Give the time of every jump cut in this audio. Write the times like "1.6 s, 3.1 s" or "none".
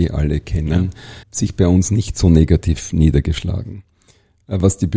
1.2 s